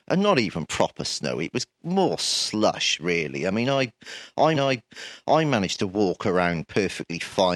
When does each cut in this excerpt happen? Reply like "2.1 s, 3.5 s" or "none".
4.5 s

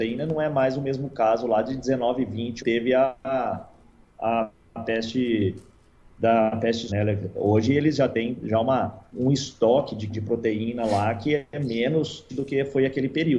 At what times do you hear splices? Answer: 2.6 s, 6.9 s, 9.1 s, 10.1 s, 12.3 s

